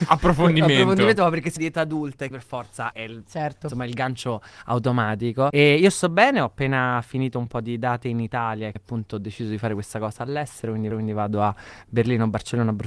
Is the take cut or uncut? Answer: cut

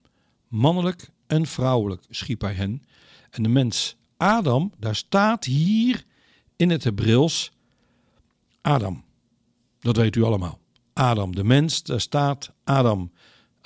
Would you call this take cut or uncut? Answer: uncut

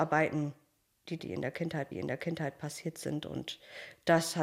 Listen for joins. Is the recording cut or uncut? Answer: cut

